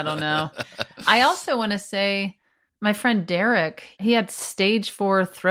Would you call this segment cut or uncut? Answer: uncut